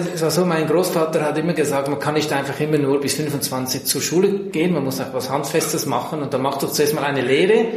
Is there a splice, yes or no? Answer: no